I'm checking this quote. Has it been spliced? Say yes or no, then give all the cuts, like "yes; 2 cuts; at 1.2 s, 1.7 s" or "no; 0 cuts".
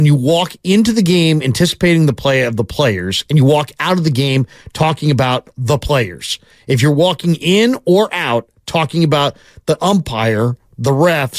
no; 0 cuts